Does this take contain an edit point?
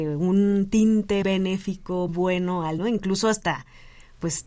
yes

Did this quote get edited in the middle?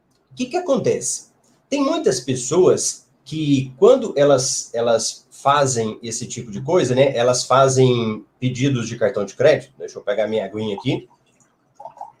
no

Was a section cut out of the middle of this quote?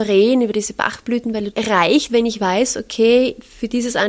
yes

